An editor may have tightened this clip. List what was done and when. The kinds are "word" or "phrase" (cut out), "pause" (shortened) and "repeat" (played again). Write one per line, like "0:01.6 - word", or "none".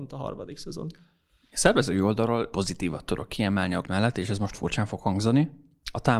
0:02.5 - word
0:03.8 - word
0:04.5 - word